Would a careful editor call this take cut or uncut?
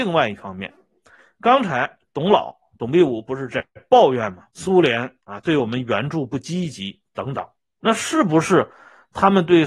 cut